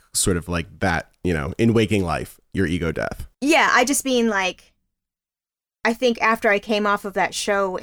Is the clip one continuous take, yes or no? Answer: no